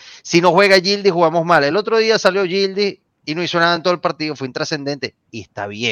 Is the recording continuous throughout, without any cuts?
yes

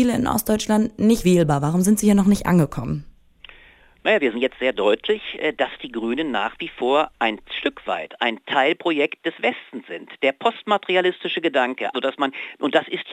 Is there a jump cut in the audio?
yes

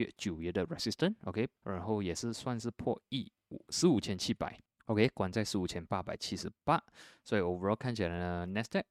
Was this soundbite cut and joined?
yes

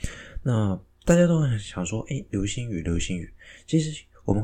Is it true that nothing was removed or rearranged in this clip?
yes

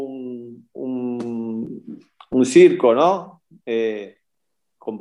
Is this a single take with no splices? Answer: yes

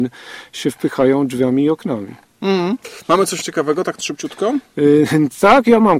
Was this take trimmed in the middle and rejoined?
yes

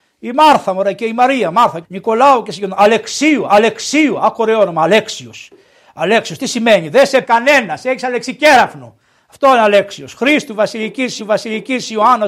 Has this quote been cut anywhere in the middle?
yes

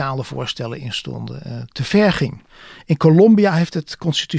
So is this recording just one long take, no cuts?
yes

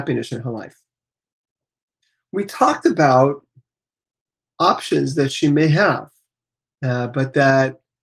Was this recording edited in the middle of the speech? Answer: no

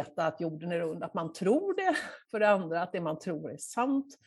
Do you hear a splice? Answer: no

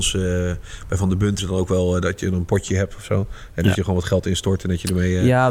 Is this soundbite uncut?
no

